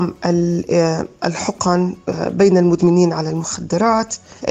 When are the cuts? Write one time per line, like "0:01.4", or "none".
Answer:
none